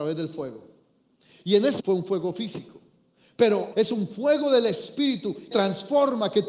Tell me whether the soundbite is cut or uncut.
cut